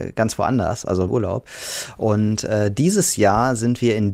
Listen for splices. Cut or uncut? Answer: cut